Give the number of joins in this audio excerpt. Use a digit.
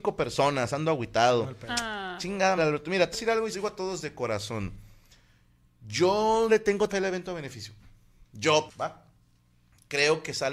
6